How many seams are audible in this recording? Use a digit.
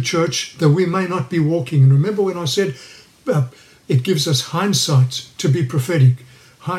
0